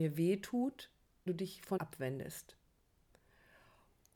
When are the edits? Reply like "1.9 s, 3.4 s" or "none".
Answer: 1.3 s, 1.8 s